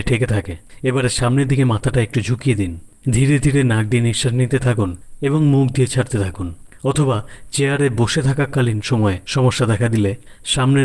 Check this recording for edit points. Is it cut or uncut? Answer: cut